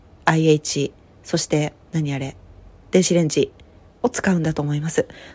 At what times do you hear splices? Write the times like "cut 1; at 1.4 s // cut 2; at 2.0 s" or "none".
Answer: cut 1; at 1.8 s